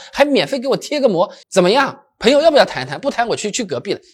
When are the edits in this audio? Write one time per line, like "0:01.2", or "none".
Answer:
0:01.4